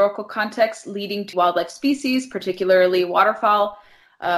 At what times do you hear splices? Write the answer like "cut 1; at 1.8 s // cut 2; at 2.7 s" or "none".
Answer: cut 1; at 1.3 s